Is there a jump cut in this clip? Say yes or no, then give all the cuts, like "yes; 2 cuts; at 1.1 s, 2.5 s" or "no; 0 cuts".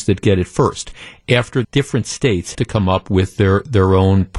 yes; 2 cuts; at 1.6 s, 2.5 s